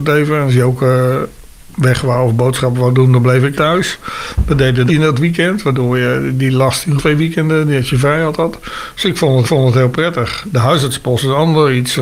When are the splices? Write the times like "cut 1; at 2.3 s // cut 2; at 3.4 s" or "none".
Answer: cut 1; at 3.5 s // cut 2; at 4.9 s // cut 3; at 7.0 s // cut 4; at 9.4 s